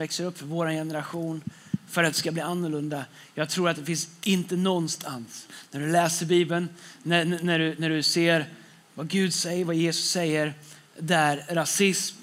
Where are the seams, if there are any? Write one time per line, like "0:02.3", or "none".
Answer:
none